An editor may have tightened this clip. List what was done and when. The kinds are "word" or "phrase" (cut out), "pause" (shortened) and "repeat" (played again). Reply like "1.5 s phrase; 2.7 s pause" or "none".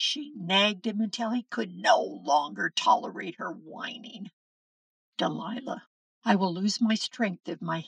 6.0 s pause